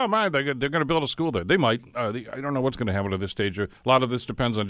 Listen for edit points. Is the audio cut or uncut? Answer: cut